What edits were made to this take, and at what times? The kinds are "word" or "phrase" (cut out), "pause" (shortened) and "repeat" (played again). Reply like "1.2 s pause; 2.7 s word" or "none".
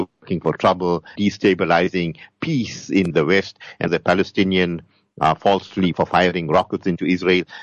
1.2 s word; 3.1 s word; 3.9 s word; 5.9 s word